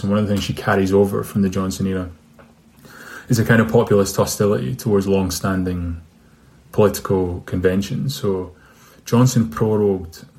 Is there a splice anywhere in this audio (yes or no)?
no